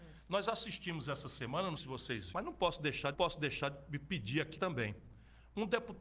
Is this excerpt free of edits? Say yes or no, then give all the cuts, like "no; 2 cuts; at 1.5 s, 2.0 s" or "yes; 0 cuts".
no; 4 cuts; at 1.8 s, 2.3 s, 3.1 s, 4.5 s